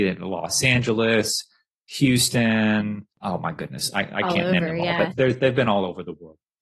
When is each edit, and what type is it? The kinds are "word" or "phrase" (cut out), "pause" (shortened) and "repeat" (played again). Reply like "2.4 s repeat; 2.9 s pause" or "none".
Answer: 3.1 s pause; 5.1 s word